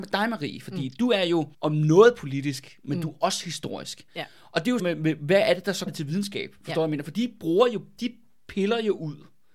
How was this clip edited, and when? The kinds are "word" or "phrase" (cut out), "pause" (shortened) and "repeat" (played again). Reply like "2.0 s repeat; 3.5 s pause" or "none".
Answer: 1.5 s pause; 4.8 s phrase; 5.9 s word